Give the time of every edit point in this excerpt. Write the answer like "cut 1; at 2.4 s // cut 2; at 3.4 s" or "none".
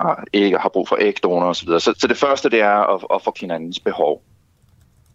cut 1; at 1.9 s // cut 2; at 3.3 s